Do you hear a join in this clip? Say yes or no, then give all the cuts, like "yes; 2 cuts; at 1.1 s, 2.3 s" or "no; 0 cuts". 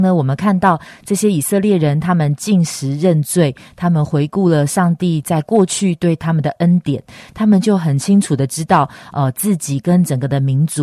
no; 0 cuts